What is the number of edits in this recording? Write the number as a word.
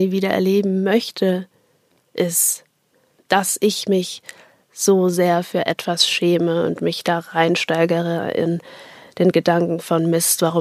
zero